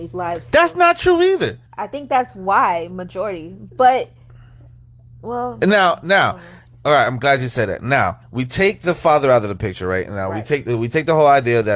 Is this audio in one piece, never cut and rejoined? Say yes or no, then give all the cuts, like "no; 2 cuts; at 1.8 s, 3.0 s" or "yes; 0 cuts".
no; 2 cuts; at 1.7 s, 8.2 s